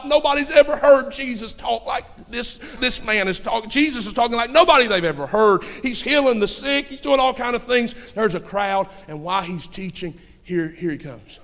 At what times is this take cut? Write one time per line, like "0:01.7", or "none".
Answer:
0:02.8